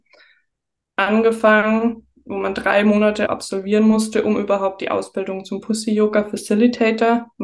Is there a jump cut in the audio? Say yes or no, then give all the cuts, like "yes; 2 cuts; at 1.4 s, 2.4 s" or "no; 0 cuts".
yes; 1 cut; at 3.3 s